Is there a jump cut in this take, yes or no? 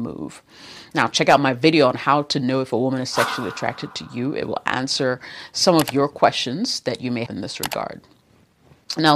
yes